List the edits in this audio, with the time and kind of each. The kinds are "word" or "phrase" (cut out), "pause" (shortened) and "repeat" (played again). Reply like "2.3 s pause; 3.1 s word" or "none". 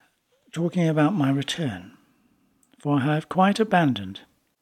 none